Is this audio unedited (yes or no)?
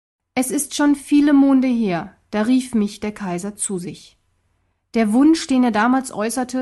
yes